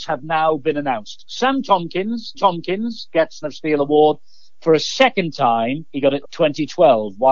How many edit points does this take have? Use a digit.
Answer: 3